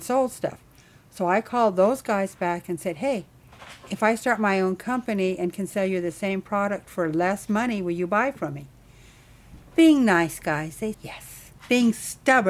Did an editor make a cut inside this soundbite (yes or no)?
yes